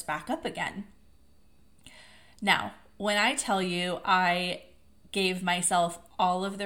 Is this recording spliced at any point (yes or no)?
no